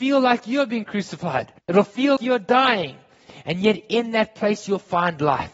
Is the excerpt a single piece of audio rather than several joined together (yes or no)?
no